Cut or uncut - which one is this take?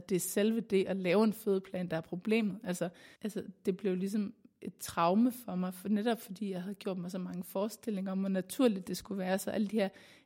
cut